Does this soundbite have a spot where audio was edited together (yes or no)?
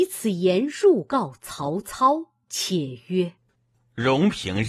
yes